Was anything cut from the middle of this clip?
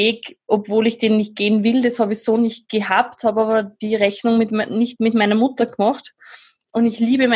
no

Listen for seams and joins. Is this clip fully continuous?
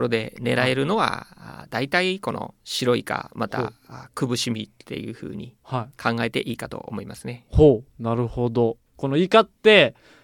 no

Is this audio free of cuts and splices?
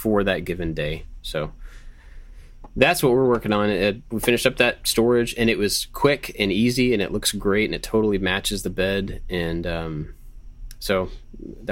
yes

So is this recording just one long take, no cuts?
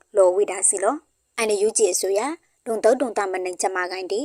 yes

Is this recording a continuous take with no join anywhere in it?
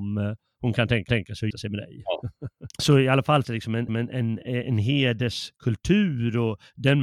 no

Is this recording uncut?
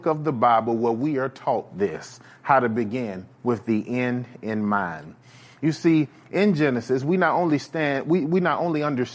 yes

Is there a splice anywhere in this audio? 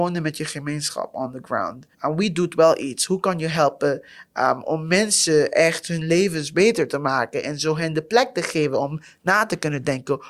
yes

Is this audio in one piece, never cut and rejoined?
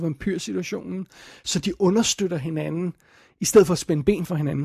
yes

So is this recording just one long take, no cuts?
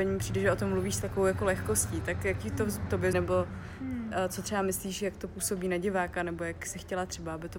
no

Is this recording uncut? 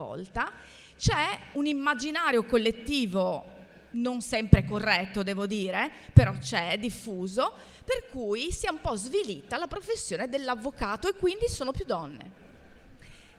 no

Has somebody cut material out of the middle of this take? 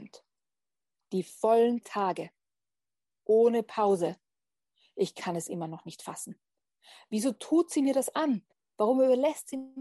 yes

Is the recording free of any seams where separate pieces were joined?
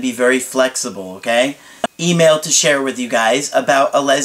no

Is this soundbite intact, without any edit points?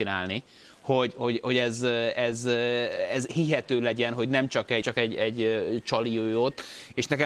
no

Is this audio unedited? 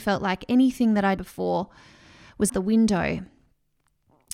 no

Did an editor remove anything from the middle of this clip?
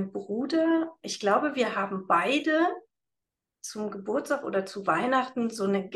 no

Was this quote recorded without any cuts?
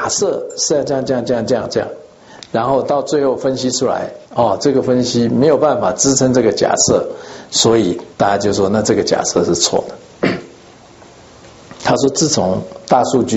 no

